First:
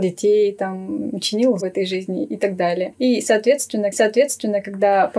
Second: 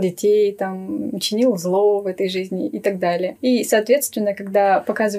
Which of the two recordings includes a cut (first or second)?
first